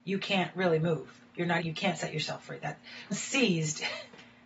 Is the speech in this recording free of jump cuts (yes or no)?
no